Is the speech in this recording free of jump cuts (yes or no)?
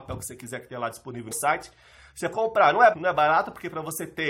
no